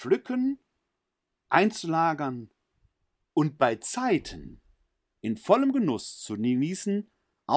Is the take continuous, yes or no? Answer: yes